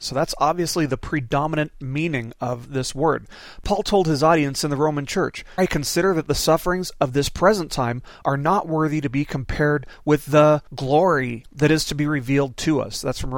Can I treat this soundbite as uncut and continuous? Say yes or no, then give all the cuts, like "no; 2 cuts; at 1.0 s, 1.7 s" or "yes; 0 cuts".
no; 2 cuts; at 5.6 s, 10.7 s